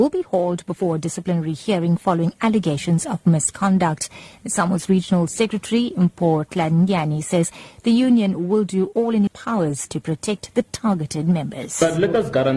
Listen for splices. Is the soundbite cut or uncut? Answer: cut